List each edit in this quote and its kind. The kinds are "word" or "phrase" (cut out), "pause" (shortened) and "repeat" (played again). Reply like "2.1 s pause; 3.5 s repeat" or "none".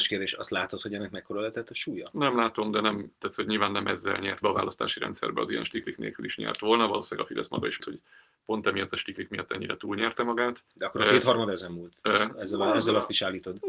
3.2 s pause; 4.4 s phrase; 7.8 s word; 10.7 s pause